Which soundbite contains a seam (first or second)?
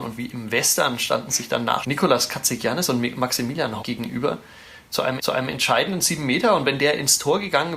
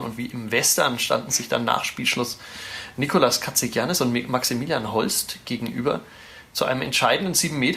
first